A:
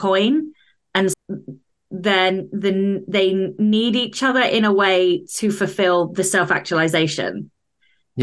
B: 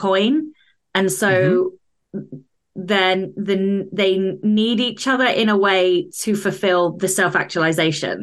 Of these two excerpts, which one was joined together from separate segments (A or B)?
A